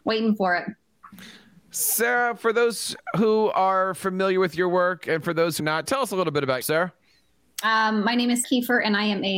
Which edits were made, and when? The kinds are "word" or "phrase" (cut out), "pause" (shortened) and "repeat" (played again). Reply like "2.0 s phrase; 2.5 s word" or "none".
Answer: 5.6 s word; 6.6 s word; 8.4 s word